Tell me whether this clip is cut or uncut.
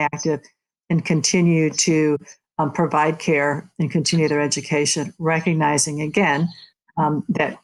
uncut